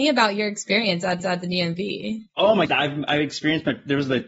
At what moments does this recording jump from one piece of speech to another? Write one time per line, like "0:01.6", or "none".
0:01.2
0:02.3
0:02.7